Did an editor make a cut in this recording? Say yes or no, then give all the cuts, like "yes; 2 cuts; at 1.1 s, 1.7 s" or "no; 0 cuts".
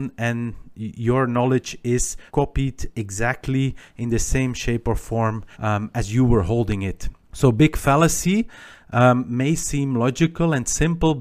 yes; 3 cuts; at 2.3 s, 5.5 s, 7.2 s